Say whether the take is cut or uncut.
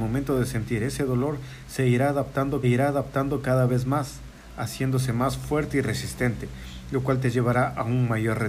cut